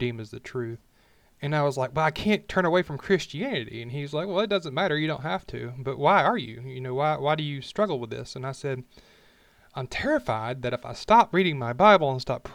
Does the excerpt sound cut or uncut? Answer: cut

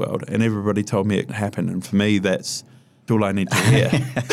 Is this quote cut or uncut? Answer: cut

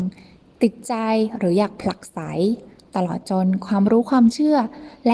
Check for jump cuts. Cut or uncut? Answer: uncut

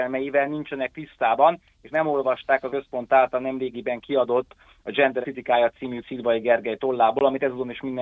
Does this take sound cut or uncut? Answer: cut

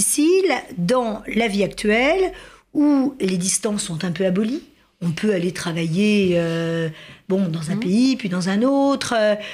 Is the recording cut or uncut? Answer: uncut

